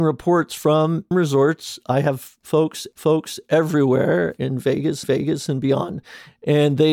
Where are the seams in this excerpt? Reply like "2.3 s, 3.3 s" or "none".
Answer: 1.1 s, 2.9 s, 5.0 s